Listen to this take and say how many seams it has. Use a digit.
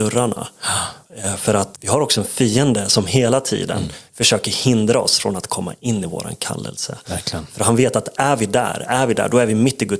1